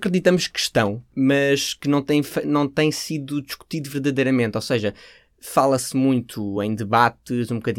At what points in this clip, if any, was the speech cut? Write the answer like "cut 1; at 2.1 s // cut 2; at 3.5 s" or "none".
none